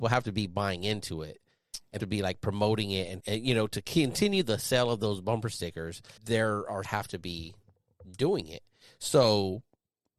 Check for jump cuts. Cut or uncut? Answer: cut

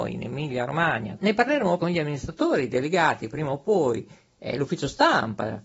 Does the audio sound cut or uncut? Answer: cut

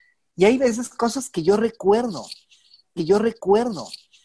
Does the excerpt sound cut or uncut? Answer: cut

